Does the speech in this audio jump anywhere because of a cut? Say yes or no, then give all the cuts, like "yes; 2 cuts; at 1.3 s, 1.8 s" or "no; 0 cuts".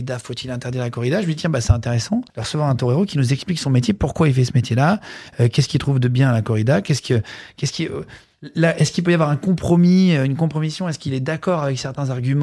yes; 1 cut; at 2.3 s